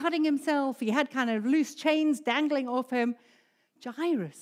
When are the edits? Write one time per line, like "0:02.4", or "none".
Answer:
none